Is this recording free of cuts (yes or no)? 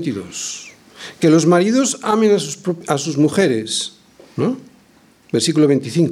yes